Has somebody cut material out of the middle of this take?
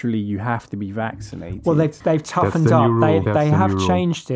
no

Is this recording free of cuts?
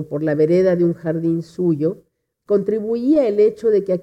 yes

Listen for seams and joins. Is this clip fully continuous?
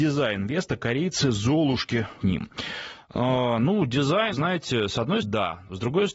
no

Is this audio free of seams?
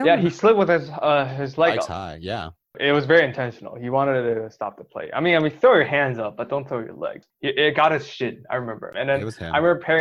yes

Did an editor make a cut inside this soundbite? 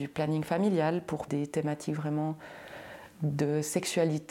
yes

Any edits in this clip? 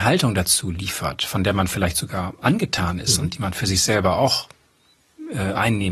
no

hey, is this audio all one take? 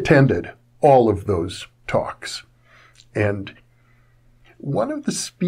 yes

